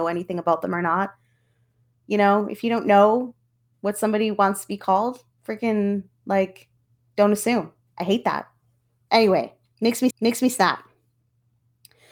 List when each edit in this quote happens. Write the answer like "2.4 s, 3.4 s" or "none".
5.3 s, 10.1 s